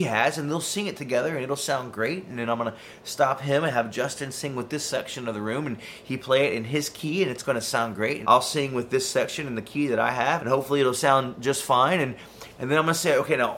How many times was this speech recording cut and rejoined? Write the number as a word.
two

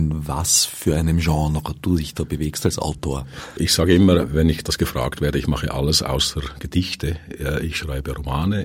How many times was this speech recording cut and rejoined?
zero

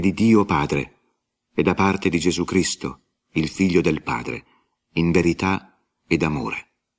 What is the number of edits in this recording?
zero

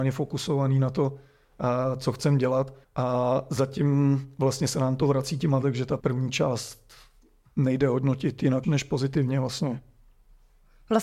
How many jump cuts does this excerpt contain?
four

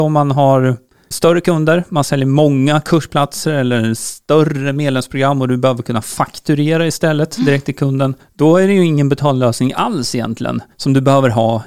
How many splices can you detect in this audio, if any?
two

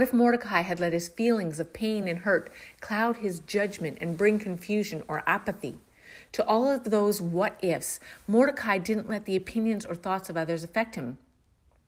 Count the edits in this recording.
zero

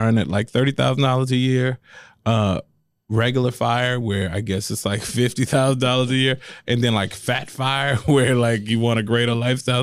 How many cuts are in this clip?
zero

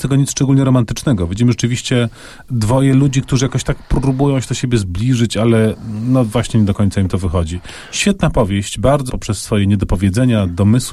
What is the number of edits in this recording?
one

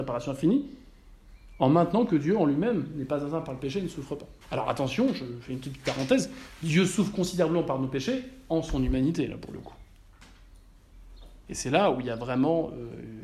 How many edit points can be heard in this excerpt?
one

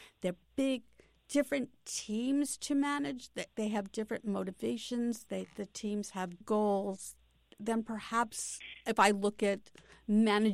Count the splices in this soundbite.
two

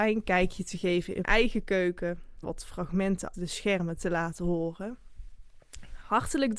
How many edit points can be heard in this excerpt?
three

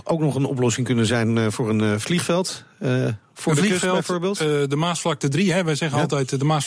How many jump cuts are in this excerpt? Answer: zero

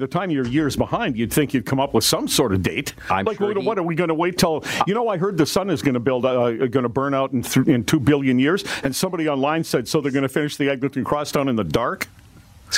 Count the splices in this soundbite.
zero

